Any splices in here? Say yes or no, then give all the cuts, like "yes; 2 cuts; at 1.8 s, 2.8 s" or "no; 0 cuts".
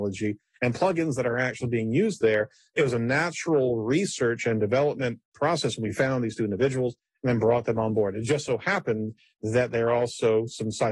no; 0 cuts